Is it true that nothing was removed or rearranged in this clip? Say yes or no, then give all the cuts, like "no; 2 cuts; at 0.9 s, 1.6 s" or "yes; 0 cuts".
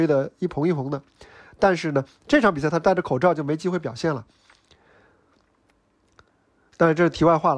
yes; 0 cuts